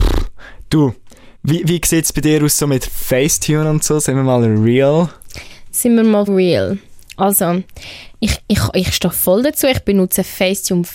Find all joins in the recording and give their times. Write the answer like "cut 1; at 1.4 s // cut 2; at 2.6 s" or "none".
cut 1; at 1.4 s // cut 2; at 6.3 s // cut 3; at 8.4 s